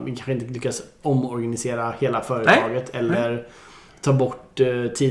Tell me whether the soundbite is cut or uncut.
uncut